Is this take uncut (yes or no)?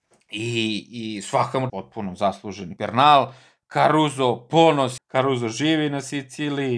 no